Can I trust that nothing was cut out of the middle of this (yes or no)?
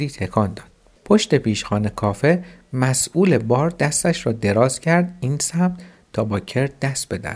yes